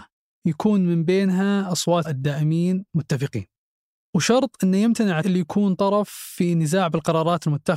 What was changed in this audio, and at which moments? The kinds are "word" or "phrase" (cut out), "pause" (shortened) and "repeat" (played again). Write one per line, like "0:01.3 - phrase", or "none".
0:02.0 - word
0:02.9 - pause
0:05.2 - word